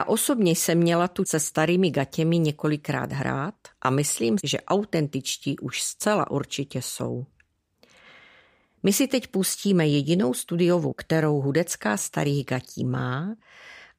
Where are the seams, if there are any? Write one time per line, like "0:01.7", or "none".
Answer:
0:01.3
0:04.4
0:10.9
0:12.0